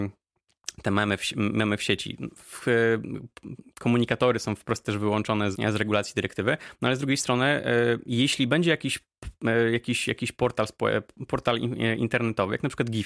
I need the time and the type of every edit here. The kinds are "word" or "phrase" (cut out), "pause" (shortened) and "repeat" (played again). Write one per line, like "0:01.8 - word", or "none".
0:05.5 - word